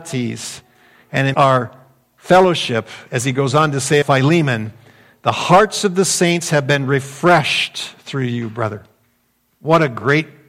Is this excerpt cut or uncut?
cut